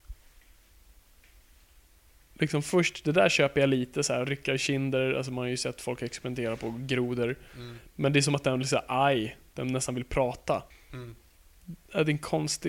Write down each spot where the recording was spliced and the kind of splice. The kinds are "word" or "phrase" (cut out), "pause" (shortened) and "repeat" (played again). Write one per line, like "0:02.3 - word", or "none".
0:10.7 - pause